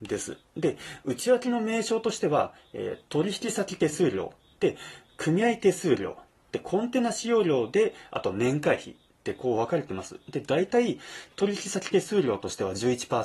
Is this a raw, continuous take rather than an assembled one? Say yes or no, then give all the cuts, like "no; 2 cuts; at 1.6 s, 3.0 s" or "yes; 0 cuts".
yes; 0 cuts